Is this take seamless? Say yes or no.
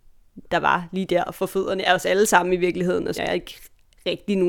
no